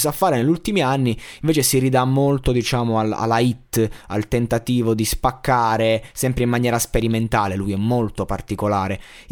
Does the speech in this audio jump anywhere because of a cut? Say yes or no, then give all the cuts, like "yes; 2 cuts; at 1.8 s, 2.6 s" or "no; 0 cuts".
no; 0 cuts